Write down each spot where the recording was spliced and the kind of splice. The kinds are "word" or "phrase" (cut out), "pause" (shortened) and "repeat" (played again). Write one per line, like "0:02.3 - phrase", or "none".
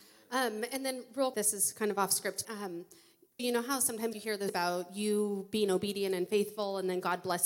0:01.3 - word
0:02.4 - word
0:03.4 - word
0:04.1 - word
0:04.5 - word